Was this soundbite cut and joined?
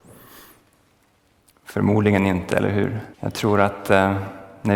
yes; 1 cut; at 3.1 s

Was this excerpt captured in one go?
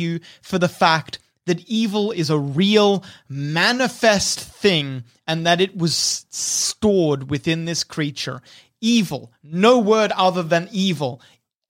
yes; 0 cuts

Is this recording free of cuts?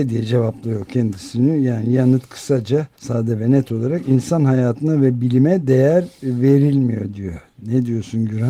no; 1 cut; at 2.9 s

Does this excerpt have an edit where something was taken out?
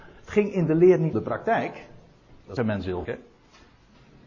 yes; 3 cuts; at 1.1 s, 2.6 s, 3.0 s

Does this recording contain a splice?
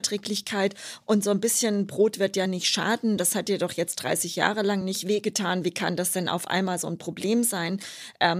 no; 0 cuts

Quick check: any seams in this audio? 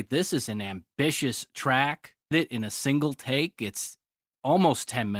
yes; 1 cut; at 2.3 s

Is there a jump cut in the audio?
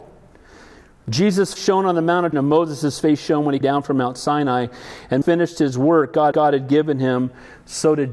yes; 5 cuts; at 1.6 s, 2.3 s, 3.6 s, 5.2 s, 6.3 s

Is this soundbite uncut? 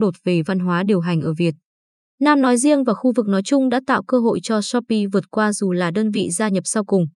yes; 0 cuts

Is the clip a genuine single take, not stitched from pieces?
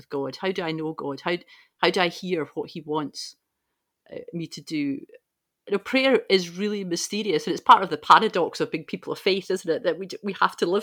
yes; 0 cuts

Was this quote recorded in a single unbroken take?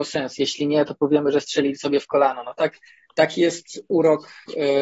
yes; 0 cuts

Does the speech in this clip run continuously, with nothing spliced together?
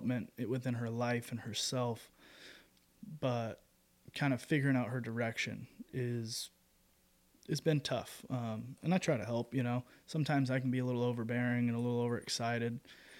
yes; 0 cuts

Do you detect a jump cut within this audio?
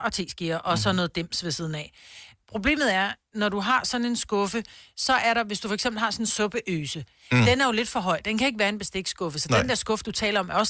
no; 0 cuts

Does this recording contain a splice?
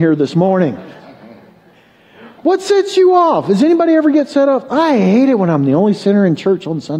yes; 1 cut; at 2.4 s

